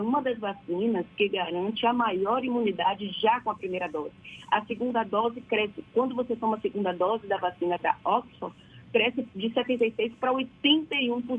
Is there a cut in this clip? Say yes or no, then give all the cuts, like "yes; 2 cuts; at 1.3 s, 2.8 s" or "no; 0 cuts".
no; 0 cuts